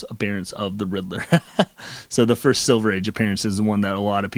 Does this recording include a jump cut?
no; 0 cuts

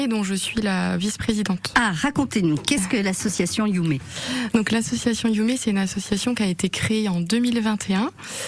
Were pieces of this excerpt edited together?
no; 0 cuts

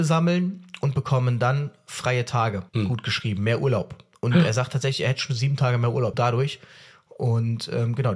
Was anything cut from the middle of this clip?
yes; 2 cuts; at 2.7 s, 6.1 s

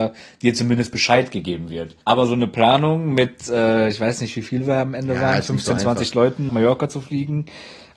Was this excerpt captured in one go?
no; 2 cuts; at 2.0 s, 6.5 s

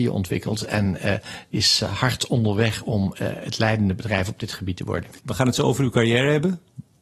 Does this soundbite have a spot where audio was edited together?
yes; 1 cut; at 5.2 s

